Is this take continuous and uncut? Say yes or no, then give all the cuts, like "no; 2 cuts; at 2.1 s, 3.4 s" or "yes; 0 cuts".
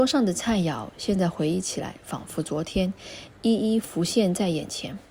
yes; 0 cuts